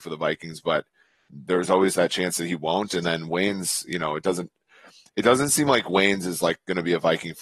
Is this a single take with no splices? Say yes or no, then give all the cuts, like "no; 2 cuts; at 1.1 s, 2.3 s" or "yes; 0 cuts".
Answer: yes; 0 cuts